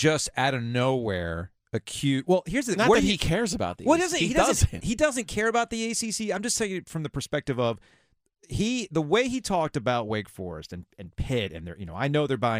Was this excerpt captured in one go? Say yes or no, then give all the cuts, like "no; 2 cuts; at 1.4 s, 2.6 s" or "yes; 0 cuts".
yes; 0 cuts